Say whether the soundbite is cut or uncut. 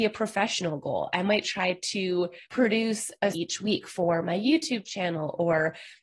cut